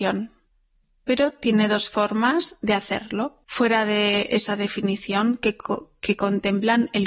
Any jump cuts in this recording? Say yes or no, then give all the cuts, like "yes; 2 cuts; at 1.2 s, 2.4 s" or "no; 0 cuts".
yes; 1 cut; at 3.4 s